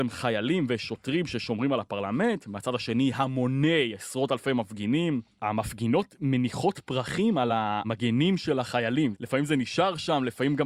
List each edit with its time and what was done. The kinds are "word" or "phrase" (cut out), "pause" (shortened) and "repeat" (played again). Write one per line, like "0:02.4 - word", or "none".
none